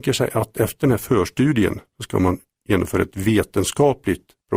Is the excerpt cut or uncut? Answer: uncut